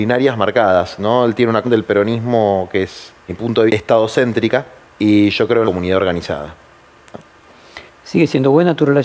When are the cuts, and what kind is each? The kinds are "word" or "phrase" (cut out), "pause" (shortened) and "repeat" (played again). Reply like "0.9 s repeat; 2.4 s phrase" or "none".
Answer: 1.6 s word; 3.3 s word; 3.7 s word; 4.8 s pause; 5.6 s phrase; 7.9 s pause